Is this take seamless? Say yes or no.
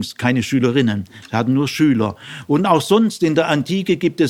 yes